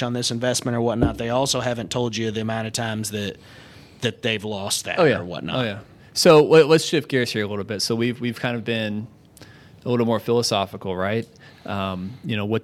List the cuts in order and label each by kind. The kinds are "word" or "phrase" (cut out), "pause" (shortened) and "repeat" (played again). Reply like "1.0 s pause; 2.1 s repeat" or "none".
none